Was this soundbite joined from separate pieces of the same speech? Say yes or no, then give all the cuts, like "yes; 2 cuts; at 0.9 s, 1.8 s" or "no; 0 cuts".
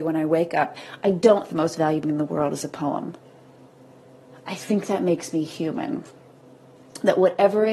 yes; 2 cuts; at 1.5 s, 2.0 s